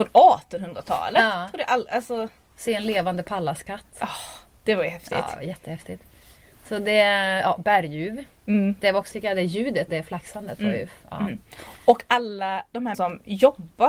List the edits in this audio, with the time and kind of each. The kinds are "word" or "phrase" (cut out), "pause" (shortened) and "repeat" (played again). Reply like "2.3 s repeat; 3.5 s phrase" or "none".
9.1 s word; 9.9 s word; 12.9 s word